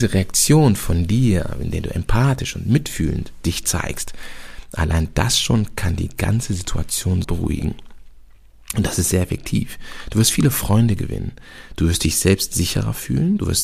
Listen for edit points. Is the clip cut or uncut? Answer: cut